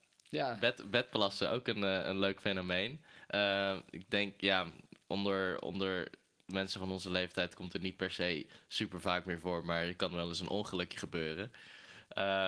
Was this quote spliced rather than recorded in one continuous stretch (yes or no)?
no